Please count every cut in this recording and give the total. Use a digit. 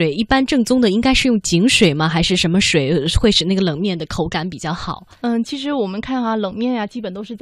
1